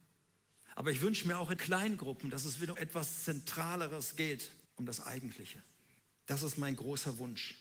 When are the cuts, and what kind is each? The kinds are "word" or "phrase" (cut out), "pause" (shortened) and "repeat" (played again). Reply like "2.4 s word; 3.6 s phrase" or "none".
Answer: 1.6 s word; 2.7 s word; 4.6 s pause; 6.0 s pause